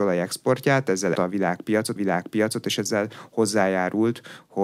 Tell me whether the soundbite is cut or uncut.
cut